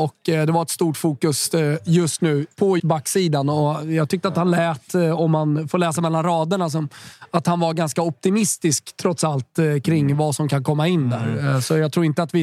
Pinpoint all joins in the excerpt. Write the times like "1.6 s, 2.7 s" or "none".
2.8 s